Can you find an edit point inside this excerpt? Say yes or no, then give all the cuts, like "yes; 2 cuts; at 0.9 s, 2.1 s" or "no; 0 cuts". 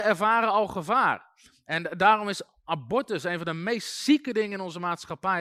no; 0 cuts